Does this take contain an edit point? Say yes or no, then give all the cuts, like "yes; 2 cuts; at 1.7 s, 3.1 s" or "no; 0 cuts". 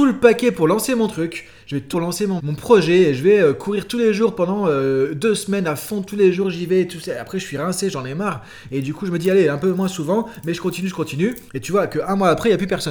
yes; 3 cuts; at 1.9 s, 2.4 s, 11.5 s